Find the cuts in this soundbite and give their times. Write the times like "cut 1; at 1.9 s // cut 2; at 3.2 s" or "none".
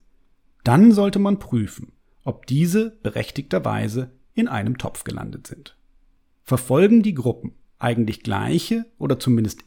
none